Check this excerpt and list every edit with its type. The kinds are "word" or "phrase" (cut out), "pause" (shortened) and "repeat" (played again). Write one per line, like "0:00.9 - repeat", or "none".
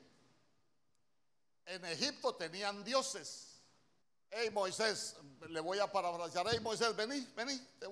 0:04.0 - pause